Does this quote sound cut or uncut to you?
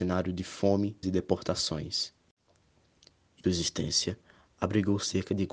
cut